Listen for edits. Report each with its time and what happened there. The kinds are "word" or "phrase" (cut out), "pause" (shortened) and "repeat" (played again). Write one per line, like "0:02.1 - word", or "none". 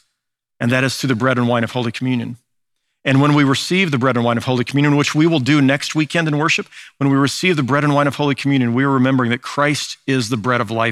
none